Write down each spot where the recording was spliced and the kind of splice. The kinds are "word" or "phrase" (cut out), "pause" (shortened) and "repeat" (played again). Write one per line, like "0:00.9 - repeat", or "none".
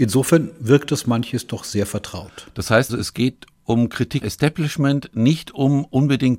0:02.9 - word
0:04.2 - word